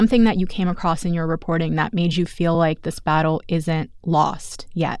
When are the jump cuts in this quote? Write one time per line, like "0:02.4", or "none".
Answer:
none

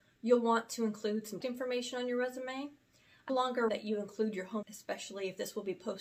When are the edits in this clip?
0:01.4
0:03.3
0:03.7
0:04.6

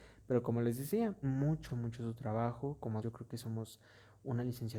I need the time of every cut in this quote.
0:01.2
0:01.7
0:03.0

